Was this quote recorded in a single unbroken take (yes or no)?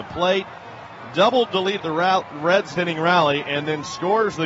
no